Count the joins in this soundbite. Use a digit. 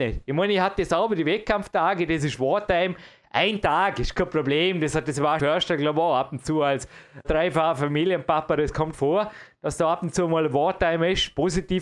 3